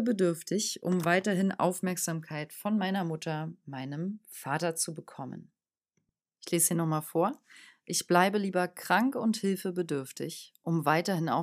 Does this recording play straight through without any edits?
yes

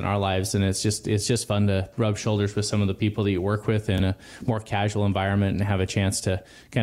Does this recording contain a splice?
no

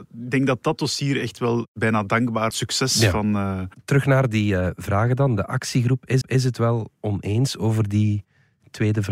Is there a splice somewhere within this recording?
yes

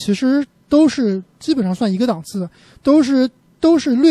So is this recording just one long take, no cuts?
yes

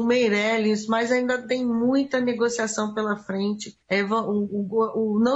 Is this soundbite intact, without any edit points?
no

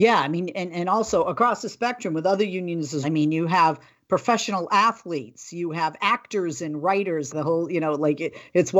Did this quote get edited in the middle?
yes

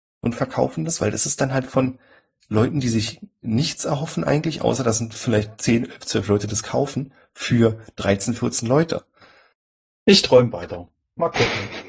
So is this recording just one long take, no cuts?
yes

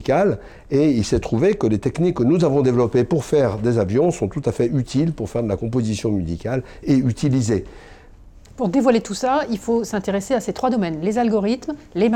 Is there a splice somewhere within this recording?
no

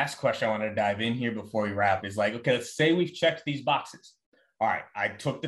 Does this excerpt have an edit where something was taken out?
yes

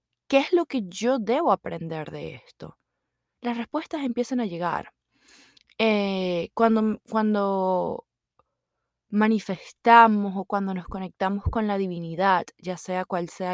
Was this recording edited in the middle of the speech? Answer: no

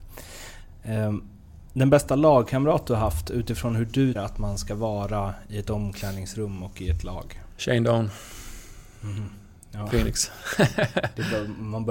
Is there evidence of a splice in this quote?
yes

